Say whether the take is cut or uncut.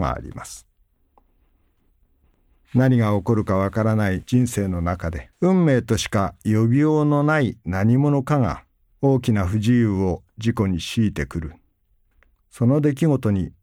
cut